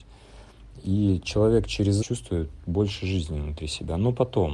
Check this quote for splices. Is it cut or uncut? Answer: cut